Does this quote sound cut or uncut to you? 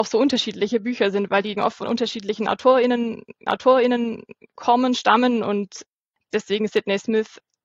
cut